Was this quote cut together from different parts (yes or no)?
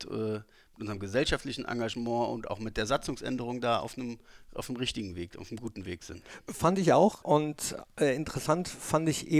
no